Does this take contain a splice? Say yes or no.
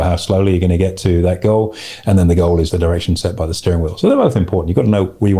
yes